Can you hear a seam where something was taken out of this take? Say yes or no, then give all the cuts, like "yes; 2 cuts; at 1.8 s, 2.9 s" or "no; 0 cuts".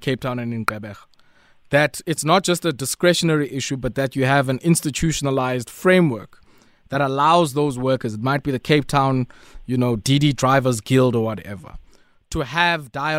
no; 0 cuts